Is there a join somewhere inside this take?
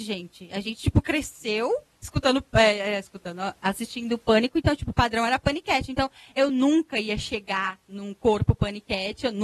no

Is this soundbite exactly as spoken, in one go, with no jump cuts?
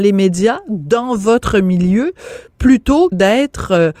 no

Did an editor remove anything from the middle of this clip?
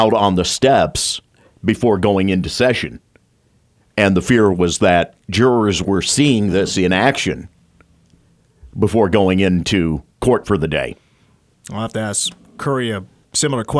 no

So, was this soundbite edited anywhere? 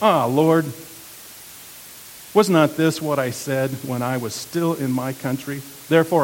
no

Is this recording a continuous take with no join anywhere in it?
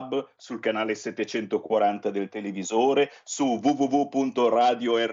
yes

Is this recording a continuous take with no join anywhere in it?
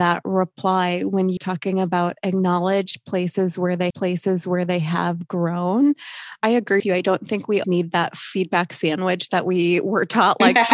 no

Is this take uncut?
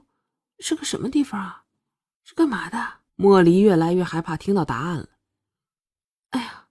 no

